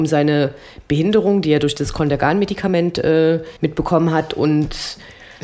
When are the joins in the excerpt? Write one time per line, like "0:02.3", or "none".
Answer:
0:03.6

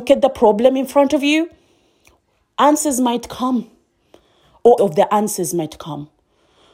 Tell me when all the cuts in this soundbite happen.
0:04.8

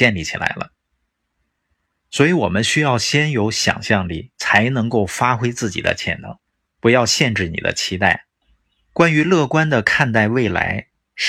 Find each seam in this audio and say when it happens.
0:04.3
0:06.5
0:08.4

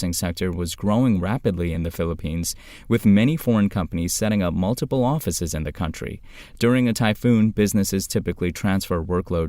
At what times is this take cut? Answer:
none

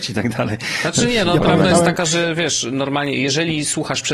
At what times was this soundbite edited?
none

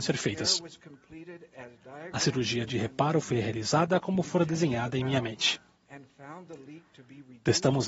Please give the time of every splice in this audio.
none

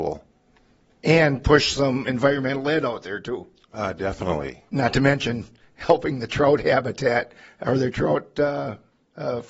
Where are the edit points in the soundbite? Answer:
0:04.7

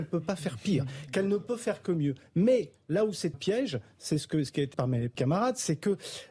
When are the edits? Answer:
0:03.3
0:04.7
0:05.1

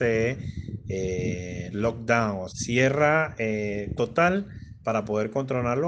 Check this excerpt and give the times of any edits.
0:01.7
0:02.5
0:04.0

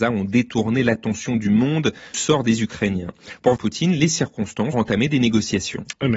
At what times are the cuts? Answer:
0:02.1
0:03.6
0:04.7

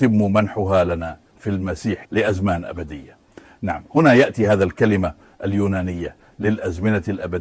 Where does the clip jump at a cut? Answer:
0:02.1

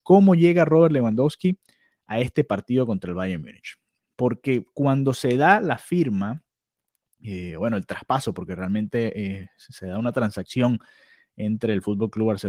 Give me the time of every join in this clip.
none

